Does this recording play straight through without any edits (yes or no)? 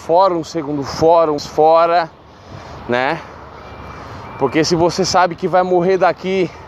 no